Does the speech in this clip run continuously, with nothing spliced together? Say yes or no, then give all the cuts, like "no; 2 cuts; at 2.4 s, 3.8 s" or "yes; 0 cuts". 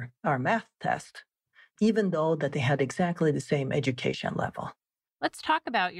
yes; 0 cuts